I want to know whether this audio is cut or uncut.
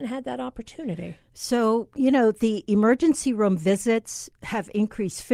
uncut